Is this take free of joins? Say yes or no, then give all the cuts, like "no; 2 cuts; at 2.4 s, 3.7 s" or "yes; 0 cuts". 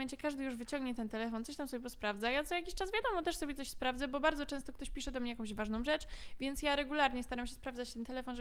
yes; 0 cuts